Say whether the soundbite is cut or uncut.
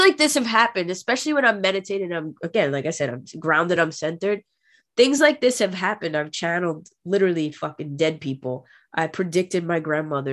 uncut